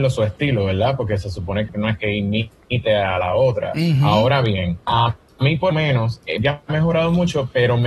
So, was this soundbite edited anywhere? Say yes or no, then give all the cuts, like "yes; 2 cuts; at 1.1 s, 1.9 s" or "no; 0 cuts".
yes; 5 cuts; at 1.7 s, 2.0 s, 4.8 s, 5.7 s, 6.4 s